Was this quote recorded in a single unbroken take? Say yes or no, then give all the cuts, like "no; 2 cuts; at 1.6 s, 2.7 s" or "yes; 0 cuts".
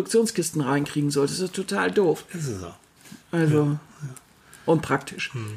yes; 0 cuts